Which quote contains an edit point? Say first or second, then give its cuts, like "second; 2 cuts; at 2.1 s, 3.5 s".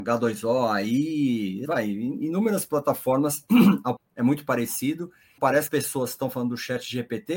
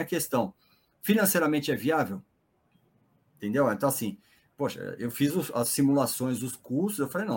first; 4 cuts; at 1.7 s, 4.0 s, 5.4 s, 5.7 s